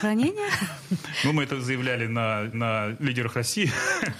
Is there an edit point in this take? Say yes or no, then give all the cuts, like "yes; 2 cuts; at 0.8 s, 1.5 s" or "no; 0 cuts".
yes; 1 cut; at 2.5 s